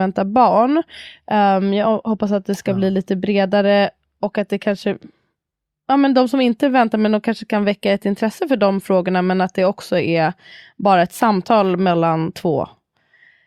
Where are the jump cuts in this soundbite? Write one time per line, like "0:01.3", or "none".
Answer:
none